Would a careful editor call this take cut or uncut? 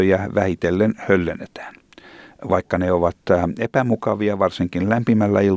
uncut